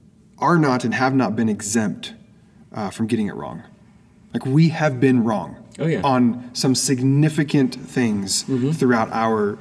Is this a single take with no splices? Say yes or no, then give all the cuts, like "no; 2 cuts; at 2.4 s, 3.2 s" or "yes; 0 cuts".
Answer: yes; 0 cuts